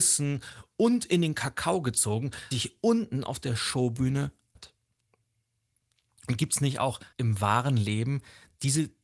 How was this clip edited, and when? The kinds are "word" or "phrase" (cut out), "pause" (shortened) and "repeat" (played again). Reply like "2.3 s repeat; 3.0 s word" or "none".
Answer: 2.5 s word; 4.6 s word; 7.1 s pause